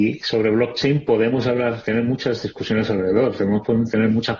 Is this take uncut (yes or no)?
yes